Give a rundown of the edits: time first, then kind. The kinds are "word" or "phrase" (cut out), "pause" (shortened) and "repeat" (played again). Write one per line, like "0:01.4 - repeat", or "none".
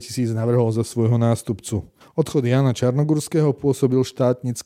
0:02.0 - pause